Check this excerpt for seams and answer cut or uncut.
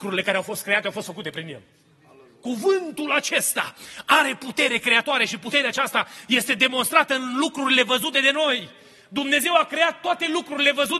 uncut